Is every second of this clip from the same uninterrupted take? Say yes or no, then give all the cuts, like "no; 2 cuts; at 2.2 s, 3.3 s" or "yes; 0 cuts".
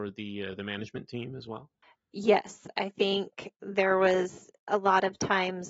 yes; 0 cuts